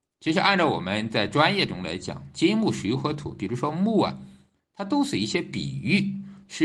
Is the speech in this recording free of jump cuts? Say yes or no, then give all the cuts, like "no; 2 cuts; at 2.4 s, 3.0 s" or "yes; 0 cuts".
yes; 0 cuts